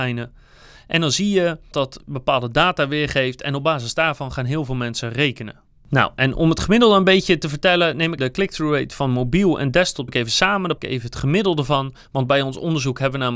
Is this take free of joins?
no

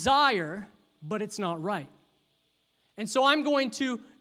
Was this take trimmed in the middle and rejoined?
no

